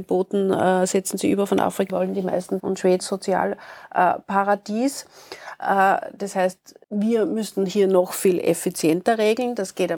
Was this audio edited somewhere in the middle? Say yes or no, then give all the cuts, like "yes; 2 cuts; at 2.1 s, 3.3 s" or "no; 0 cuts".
yes; 4 cuts; at 1.9 s, 2.6 s, 3.0 s, 6.8 s